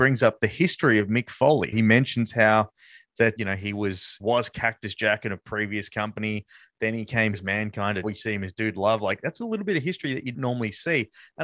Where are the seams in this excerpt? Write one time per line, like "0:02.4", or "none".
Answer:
0:01.7
0:03.4
0:04.2
0:07.3
0:08.0
0:10.3